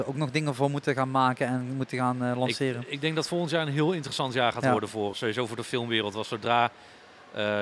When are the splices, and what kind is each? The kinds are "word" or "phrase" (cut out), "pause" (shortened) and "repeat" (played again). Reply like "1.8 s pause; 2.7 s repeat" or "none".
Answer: 5.1 s word